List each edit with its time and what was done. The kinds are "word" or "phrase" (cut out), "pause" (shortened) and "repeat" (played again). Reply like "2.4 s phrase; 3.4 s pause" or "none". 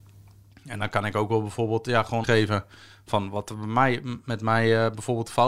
2.2 s word

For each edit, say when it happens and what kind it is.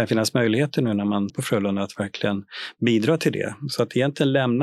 1.3 s word

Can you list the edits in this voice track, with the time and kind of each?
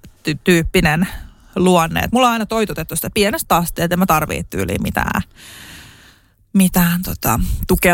none

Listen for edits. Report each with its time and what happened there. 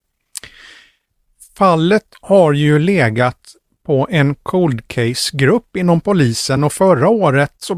none

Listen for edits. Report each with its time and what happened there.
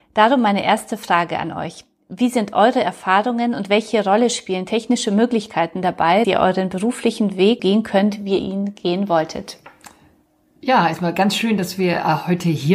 6.2 s word; 7.6 s word; 8.4 s word

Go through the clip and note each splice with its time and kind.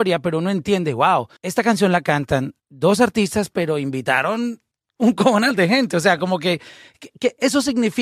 1.4 s pause; 2.6 s pause; 4.7 s pause

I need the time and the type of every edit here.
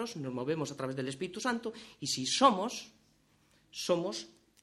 none

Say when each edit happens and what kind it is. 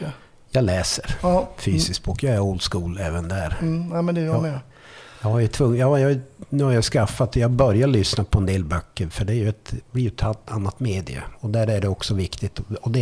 none

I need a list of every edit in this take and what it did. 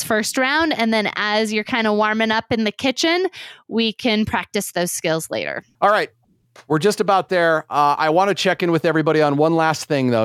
none

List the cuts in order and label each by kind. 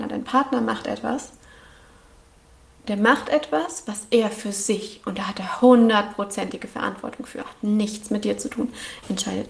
none

